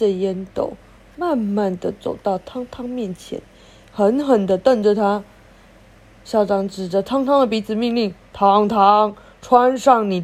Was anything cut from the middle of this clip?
no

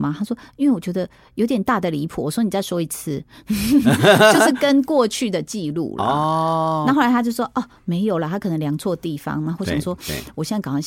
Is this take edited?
no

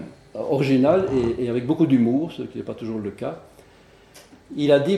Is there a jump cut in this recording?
no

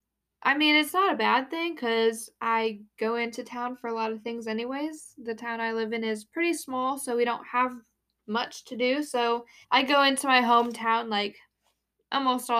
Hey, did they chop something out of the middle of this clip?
yes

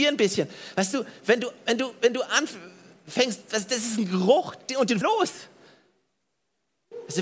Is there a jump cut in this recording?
yes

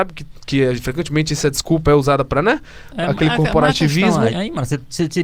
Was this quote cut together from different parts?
yes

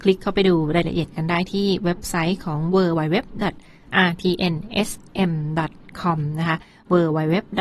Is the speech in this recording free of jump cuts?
yes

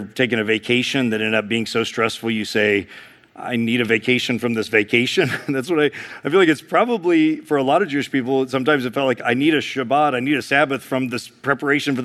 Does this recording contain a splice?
no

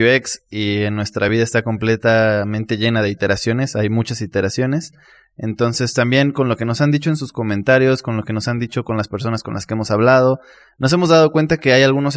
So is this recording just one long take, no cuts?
yes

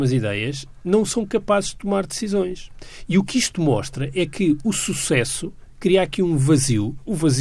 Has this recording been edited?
no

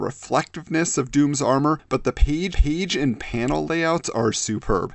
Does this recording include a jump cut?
yes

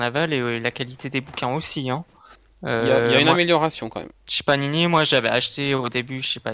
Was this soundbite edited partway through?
yes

